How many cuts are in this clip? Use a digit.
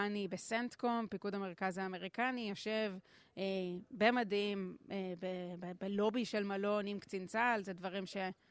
0